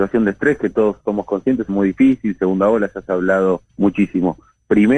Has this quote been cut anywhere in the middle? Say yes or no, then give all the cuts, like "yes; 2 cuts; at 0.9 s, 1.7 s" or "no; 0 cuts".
yes; 3 cuts; at 1.0 s, 1.7 s, 3.7 s